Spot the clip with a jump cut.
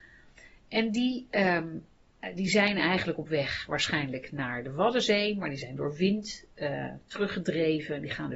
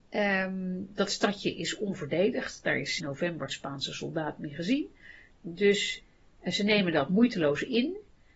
second; 2 cuts; at 3.0 s, 3.5 s

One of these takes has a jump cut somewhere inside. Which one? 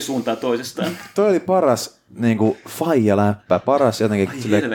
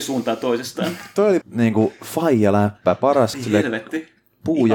second; 2 cuts; at 1.4 s, 3.3 s

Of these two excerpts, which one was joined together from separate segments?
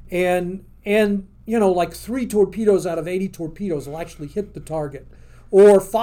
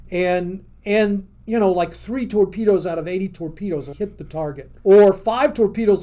second; 2 cuts; at 3.9 s, 4.8 s

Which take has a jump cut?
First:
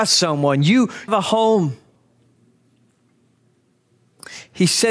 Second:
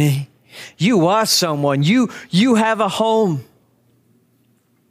first; 1 cut; at 1.1 s

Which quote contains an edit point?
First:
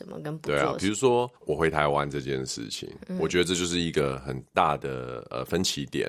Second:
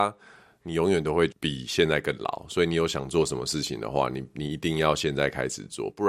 first; 1 cut; at 1.4 s

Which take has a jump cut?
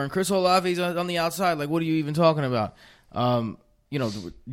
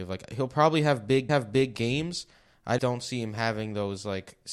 second; 2 cuts; at 1.3 s, 2.8 s

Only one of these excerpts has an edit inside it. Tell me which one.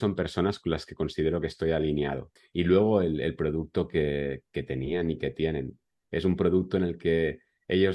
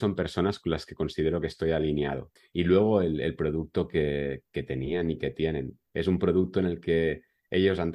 second; 1 cut; at 5.8 s

